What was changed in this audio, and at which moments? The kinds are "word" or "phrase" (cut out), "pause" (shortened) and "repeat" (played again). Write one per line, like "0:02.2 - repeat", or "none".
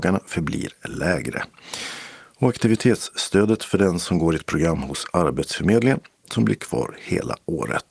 none